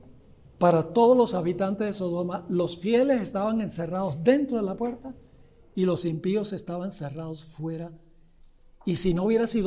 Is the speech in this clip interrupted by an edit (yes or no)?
no